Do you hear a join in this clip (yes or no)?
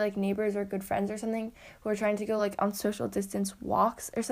no